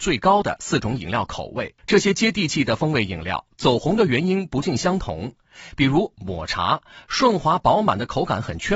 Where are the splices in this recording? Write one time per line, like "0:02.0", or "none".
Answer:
0:01.8